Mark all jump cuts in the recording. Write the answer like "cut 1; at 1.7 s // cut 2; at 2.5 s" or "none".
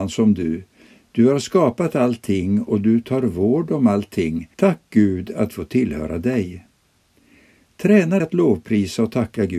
cut 1; at 4.5 s // cut 2; at 5.5 s // cut 3; at 8.2 s